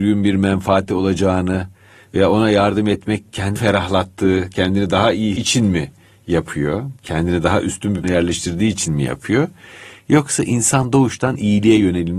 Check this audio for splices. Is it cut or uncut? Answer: cut